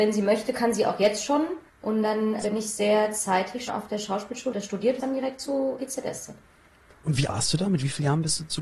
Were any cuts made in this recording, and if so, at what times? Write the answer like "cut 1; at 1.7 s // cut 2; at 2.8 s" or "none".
cut 1; at 1.7 s // cut 2; at 2.4 s // cut 3; at 3.7 s // cut 4; at 4.5 s // cut 5; at 5.0 s // cut 6; at 5.8 s // cut 7; at 7.3 s